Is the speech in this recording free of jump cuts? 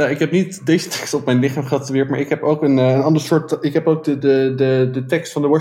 yes; 0 cuts

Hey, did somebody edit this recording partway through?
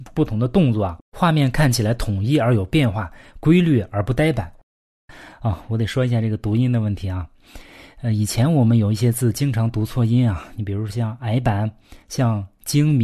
no; 0 cuts

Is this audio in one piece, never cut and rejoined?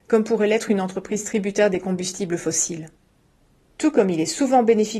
yes; 0 cuts

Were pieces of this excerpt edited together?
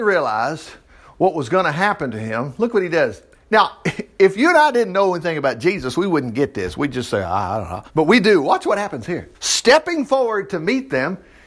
yes; 3 cuts; at 3.3 s, 7.9 s, 9.3 s

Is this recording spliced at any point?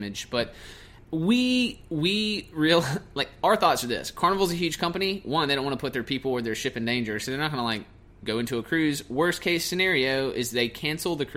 no; 0 cuts

